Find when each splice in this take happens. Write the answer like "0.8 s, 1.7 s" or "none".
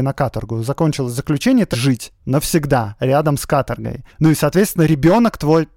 1.7 s, 2.2 s, 4.1 s